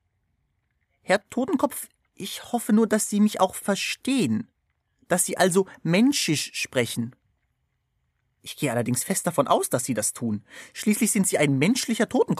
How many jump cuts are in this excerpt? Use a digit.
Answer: 0